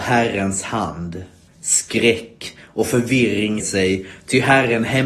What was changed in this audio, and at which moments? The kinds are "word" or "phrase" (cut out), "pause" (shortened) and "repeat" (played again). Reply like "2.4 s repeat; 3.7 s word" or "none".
1.5 s pause; 3.6 s word